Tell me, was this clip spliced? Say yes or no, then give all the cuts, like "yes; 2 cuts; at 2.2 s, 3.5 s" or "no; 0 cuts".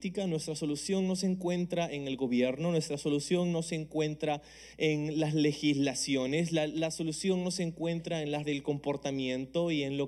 yes; 2 cuts; at 4.7 s, 8.4 s